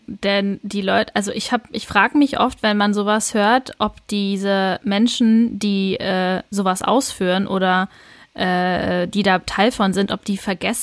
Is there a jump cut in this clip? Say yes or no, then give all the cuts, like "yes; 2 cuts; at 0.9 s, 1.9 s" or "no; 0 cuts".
no; 0 cuts